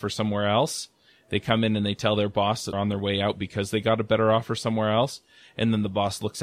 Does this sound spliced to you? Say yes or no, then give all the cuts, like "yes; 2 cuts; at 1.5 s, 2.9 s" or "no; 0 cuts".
yes; 1 cut; at 2.7 s